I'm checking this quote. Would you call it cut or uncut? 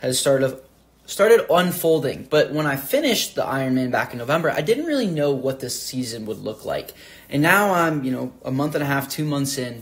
uncut